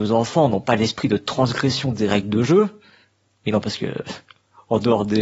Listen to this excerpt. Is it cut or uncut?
uncut